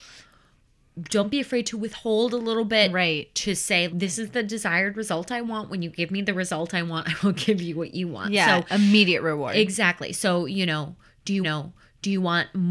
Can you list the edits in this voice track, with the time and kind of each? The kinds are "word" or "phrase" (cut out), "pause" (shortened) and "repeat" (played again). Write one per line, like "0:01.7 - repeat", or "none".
0:03.9 - word
0:11.4 - repeat